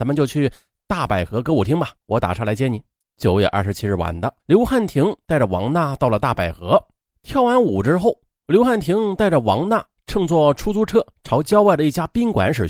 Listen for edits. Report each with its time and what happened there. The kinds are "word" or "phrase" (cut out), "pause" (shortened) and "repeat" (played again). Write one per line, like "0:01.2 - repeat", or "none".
0:02.0 - pause
0:03.0 - pause
0:04.4 - pause
0:07.0 - pause